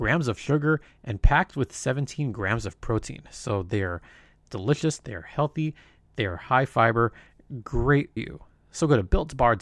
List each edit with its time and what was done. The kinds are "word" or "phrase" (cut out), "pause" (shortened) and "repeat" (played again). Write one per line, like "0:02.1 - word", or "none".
0:08.2 - word